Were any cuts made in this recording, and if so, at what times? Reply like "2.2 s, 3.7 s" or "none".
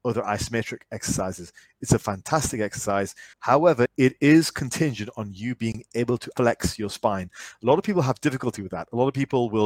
3.3 s